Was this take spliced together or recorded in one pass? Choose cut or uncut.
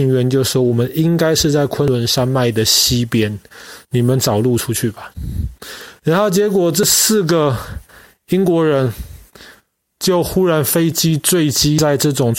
uncut